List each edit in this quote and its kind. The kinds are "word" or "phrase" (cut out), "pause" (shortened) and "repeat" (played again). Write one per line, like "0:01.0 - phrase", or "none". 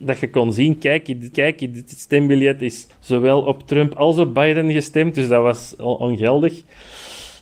0:01.3 - repeat
0:02.9 - pause